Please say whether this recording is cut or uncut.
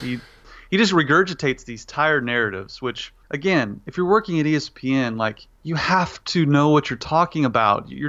cut